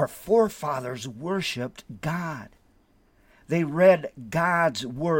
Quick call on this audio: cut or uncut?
uncut